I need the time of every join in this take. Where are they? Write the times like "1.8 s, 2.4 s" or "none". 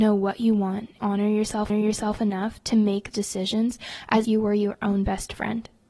1.0 s, 1.7 s, 3.1 s, 4.2 s